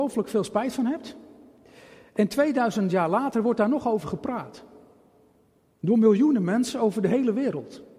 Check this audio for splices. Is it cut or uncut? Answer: uncut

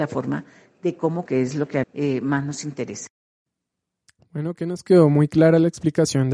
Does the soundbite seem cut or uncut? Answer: cut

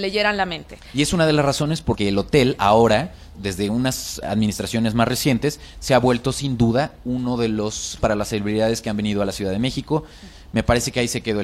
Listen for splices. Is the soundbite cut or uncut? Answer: cut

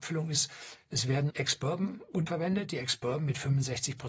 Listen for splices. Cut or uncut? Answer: cut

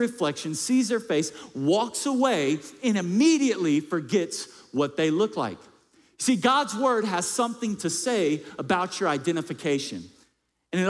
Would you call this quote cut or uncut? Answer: uncut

